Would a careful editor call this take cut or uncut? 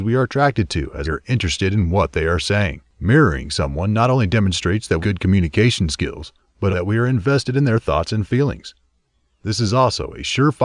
cut